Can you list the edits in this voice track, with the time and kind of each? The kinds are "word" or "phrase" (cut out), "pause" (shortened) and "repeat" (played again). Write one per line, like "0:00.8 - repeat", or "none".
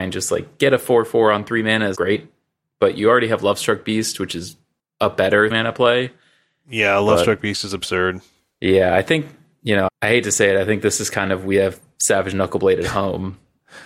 0:01.9 - word
0:05.5 - word
0:09.9 - word